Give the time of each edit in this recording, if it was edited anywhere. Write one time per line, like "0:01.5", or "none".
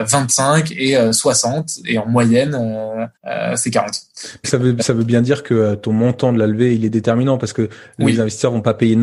0:03.2
0:04.4